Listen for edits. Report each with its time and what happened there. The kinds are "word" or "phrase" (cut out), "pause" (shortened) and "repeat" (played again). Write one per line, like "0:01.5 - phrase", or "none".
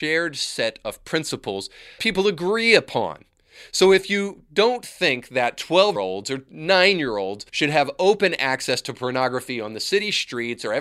0:02.0 - word
0:06.0 - word
0:07.5 - pause

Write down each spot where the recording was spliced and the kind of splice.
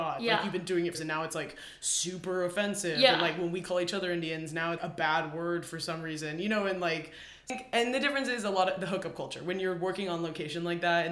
0:00.9 - phrase
0:04.8 - word

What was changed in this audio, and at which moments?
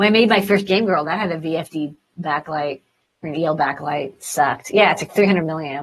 0:03.1 - pause

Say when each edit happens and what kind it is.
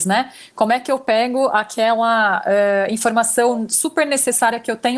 none

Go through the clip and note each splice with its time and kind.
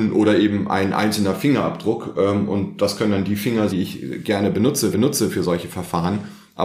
0:03.7 - word
0:04.9 - repeat

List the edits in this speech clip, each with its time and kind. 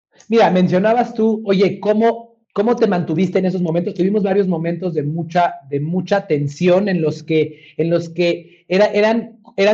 0:02.4 - pause

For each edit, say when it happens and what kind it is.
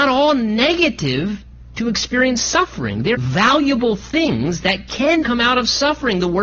0:03.1 - word
0:05.2 - word

